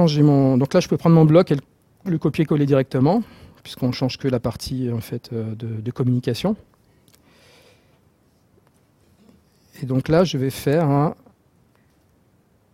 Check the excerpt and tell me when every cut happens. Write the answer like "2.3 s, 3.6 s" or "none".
none